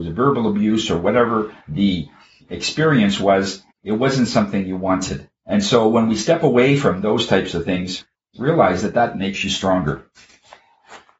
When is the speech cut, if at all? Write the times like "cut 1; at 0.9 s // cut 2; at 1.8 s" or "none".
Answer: cut 1; at 1.6 s // cut 2; at 3.7 s // cut 3; at 5.4 s // cut 4; at 8.1 s